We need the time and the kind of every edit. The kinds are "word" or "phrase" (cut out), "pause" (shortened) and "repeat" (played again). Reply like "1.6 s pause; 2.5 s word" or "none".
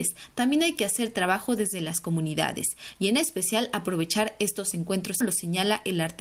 5.2 s phrase

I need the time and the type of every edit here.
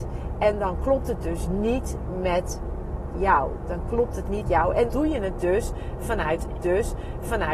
4.4 s word; 4.9 s word; 6.6 s repeat

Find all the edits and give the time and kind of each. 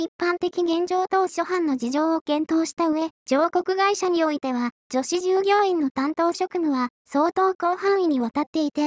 3.2 s pause; 4.8 s pause; 7.0 s pause

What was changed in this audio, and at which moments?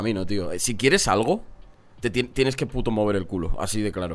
none

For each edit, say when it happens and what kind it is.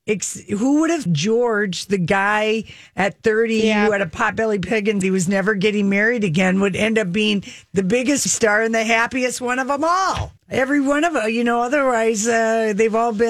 1.1 s phrase; 5.0 s word; 8.3 s word; 10.4 s pause

